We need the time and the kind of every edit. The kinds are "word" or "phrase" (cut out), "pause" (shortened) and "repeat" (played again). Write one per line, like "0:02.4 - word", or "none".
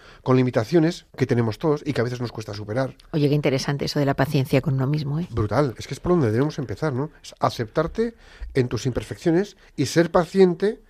0:01.1 - pause